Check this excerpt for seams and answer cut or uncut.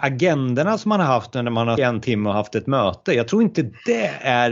cut